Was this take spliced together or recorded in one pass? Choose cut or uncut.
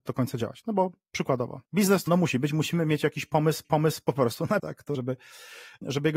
cut